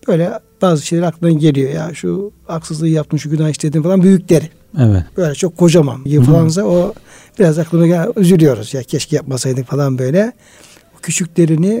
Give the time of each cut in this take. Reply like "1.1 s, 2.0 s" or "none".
5.1 s, 6.1 s